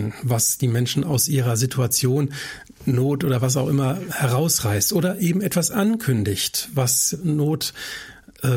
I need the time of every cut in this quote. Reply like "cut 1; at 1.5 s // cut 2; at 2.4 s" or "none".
none